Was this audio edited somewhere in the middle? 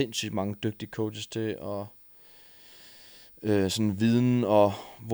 no; 0 cuts

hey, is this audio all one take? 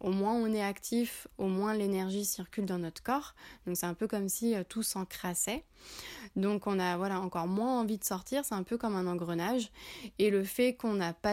yes; 0 cuts

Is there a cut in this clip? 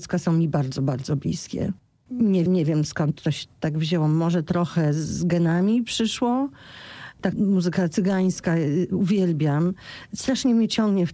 yes; 3 cuts; at 2.5 s, 3.5 s, 7.3 s

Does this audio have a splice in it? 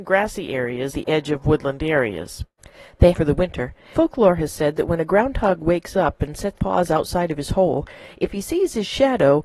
yes; 4 cuts; at 0.9 s, 3.1 s, 3.9 s, 6.5 s

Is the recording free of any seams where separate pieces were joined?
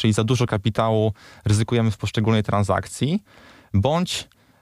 yes; 0 cuts

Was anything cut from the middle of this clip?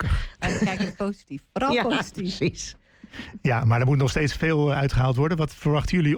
no; 0 cuts

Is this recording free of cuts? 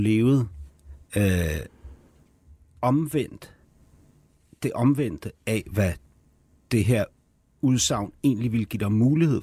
yes; 0 cuts

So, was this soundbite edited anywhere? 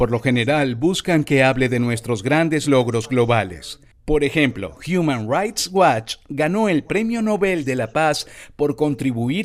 no; 0 cuts

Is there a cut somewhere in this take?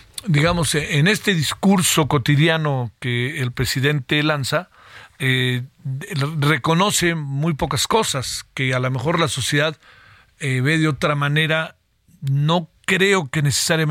no; 0 cuts

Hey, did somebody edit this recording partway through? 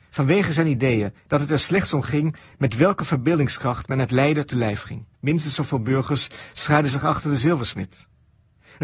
yes; 2 cuts; at 1.2 s, 5.1 s

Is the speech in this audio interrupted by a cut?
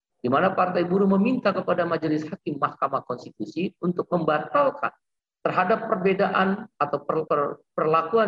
yes; 1 cut; at 7.3 s

